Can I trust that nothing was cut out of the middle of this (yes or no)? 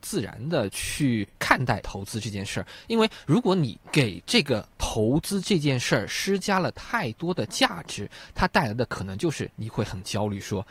no